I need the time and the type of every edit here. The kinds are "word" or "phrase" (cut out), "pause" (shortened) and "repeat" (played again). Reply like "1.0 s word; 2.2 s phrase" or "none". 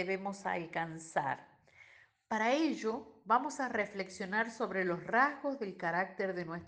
none

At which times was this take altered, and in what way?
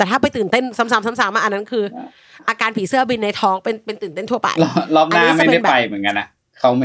none

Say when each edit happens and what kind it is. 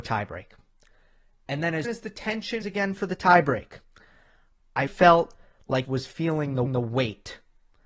1.8 s word; 2.6 s word; 4.9 s word; 5.8 s word; 6.7 s repeat

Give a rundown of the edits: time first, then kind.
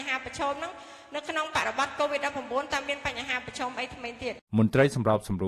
4.5 s pause

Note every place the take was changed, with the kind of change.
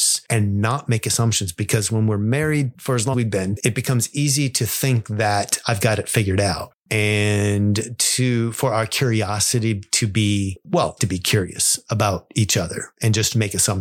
3.1 s word; 6.8 s pause; 11.0 s phrase

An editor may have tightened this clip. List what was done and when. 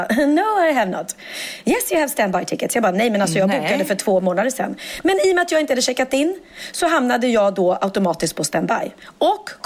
none

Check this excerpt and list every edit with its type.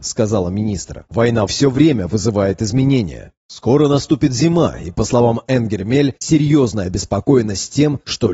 1.5 s phrase; 6.2 s word

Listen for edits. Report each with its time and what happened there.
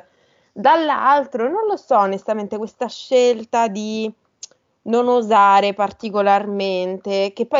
none

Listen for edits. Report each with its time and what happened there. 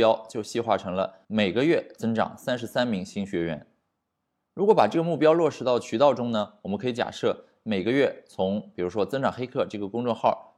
1.2 s pause

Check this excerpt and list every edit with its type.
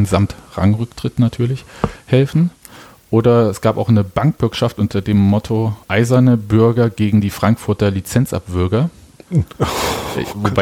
5.8 s pause

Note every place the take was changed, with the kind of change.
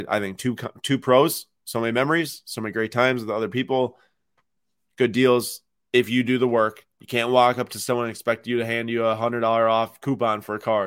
none

